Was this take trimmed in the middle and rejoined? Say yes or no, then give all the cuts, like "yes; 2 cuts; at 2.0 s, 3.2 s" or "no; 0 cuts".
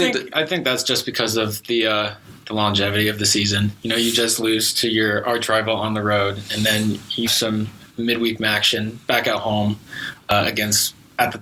yes; 1 cut; at 7.3 s